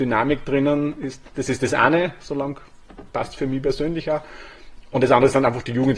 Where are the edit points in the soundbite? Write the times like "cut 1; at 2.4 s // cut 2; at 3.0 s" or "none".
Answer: none